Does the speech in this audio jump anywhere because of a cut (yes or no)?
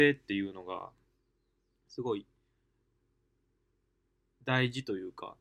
no